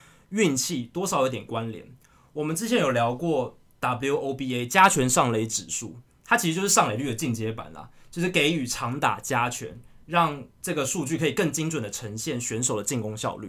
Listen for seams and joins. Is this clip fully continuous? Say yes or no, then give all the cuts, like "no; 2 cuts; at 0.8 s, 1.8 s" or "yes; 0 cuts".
no; 1 cut; at 10.5 s